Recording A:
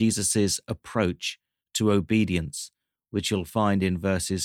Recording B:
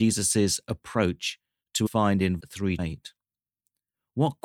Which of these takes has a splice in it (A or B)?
B